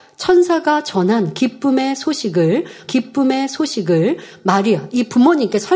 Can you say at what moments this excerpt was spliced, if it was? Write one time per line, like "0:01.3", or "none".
0:02.9